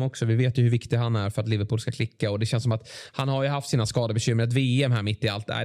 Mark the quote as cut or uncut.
uncut